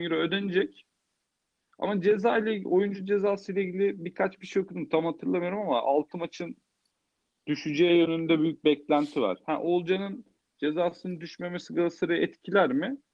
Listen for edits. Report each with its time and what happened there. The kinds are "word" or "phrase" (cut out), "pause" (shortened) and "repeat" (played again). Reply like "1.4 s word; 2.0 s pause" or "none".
none